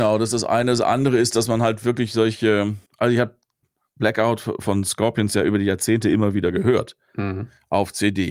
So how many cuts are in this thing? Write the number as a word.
one